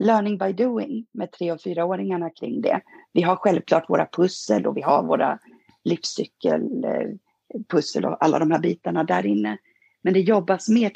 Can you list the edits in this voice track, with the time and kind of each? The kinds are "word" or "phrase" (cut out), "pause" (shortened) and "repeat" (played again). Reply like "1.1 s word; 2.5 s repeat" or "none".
none